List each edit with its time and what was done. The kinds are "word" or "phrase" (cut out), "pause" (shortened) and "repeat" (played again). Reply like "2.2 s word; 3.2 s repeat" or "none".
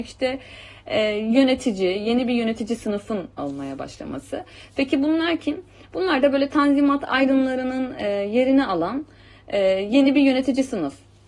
none